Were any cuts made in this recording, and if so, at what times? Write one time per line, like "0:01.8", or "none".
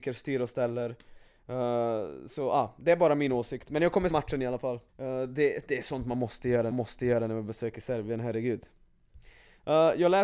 0:04.1
0:04.9
0:06.7